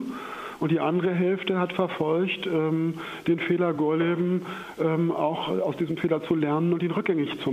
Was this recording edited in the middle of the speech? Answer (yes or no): no